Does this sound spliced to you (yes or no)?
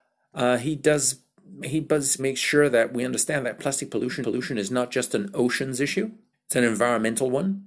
yes